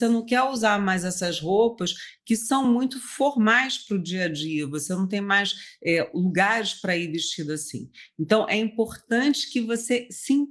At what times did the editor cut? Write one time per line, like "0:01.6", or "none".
none